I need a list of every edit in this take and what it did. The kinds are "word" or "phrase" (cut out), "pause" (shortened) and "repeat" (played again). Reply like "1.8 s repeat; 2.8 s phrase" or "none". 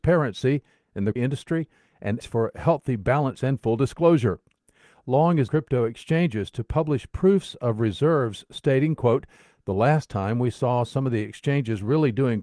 1.2 s word; 2.2 s word; 3.3 s word; 5.5 s word